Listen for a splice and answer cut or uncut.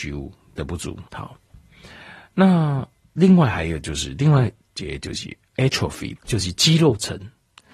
cut